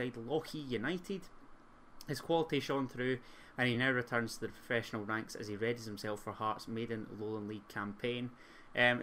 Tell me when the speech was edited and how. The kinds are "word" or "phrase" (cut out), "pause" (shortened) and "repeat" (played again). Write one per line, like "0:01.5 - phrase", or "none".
none